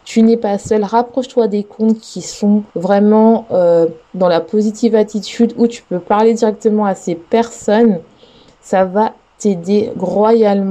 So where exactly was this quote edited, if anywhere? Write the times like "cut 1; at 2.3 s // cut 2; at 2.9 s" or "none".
cut 1; at 2.7 s